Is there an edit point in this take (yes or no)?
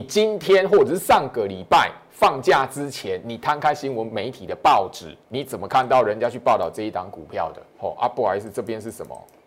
yes